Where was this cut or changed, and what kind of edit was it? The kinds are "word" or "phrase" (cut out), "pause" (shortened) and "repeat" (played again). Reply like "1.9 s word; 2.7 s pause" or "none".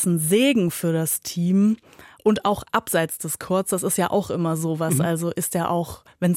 none